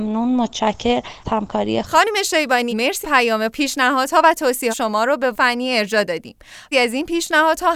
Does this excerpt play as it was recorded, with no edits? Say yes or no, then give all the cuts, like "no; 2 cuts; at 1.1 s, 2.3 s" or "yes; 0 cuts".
no; 8 cuts; at 1.2 s, 1.8 s, 2.7 s, 3.0 s, 3.5 s, 4.7 s, 5.3 s, 6.7 s